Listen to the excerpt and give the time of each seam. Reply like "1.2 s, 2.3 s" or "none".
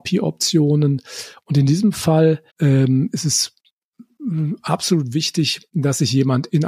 2.5 s